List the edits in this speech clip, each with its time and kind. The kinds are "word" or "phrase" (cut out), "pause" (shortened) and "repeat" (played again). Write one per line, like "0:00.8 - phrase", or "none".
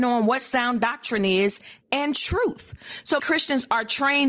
0:01.8 - pause
0:03.2 - word

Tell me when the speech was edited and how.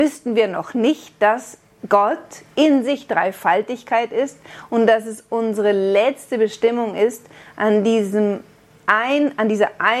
none

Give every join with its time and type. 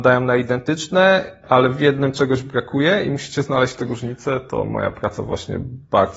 none

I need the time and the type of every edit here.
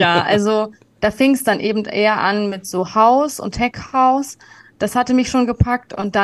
none

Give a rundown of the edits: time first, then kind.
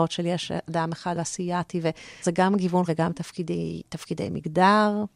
0:01.1 - word
0:02.2 - word
0:02.9 - word

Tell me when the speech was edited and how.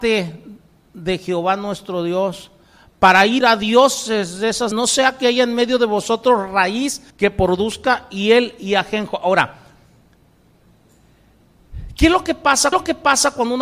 0:03.4 - phrase
0:04.7 - word
0:07.1 - pause
0:12.7 - repeat

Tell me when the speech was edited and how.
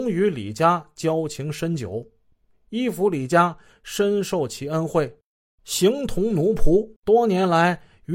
0:07.0 - pause

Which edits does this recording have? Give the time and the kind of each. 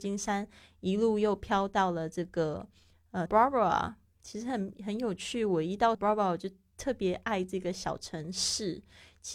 0:03.3 - word
0:05.9 - word

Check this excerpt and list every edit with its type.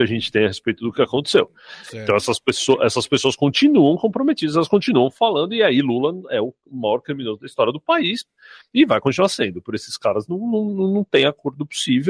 none

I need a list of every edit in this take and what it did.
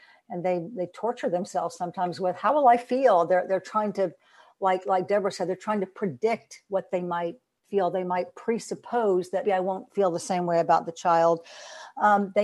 0:09.4 - word

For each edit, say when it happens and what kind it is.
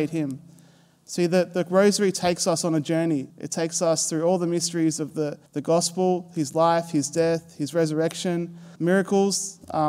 0:03.3 - pause
0:05.5 - pause
0:08.8 - pause

